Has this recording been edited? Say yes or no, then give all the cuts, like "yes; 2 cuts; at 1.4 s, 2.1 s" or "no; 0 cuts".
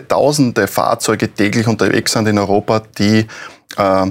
no; 0 cuts